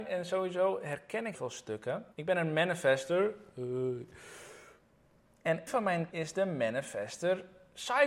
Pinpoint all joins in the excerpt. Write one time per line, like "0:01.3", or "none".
0:01.3
0:02.1
0:05.7
0:06.1